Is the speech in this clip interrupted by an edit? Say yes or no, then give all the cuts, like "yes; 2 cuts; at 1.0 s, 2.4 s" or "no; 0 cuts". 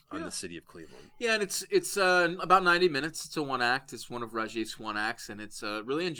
no; 0 cuts